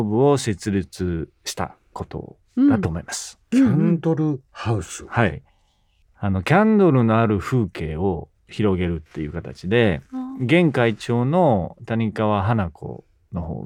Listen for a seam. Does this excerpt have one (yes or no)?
yes